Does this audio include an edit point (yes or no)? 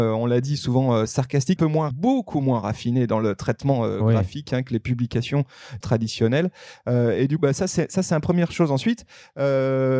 yes